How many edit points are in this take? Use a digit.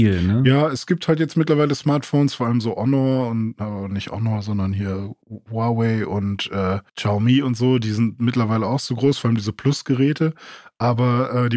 2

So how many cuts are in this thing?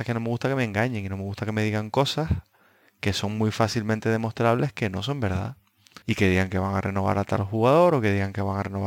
1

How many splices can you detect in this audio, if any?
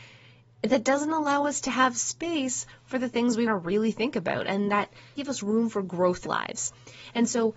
3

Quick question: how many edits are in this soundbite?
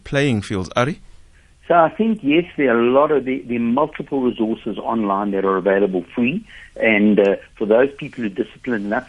1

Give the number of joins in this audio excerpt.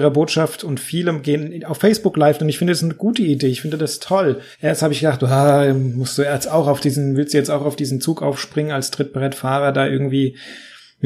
1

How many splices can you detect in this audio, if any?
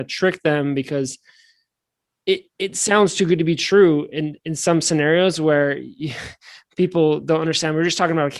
0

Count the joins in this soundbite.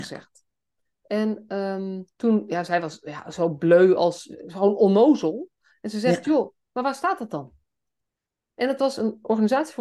1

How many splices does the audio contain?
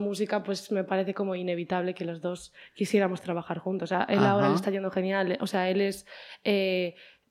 0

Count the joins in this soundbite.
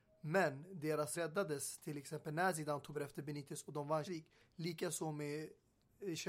3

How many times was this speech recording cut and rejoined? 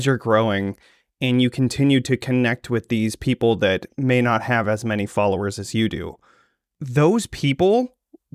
0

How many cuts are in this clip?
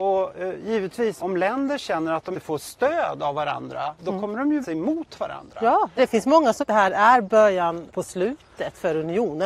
6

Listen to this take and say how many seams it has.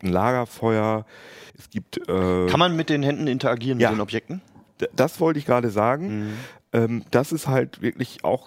1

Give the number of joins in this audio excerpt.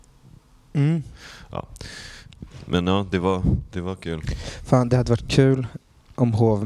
0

